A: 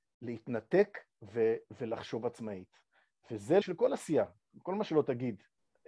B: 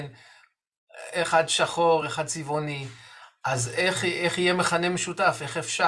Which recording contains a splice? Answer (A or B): A